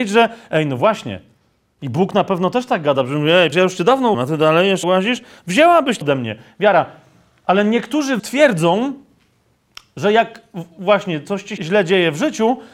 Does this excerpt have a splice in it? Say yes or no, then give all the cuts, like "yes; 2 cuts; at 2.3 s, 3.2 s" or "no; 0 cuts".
yes; 6 cuts; at 3.5 s, 4.1 s, 4.8 s, 6.0 s, 8.2 s, 11.6 s